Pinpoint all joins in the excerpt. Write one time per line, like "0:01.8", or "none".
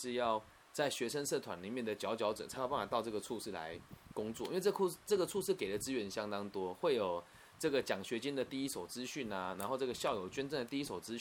none